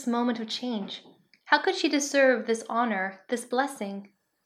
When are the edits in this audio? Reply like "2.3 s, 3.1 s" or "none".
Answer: none